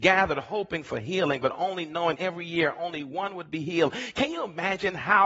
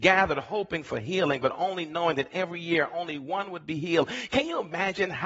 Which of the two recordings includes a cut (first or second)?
first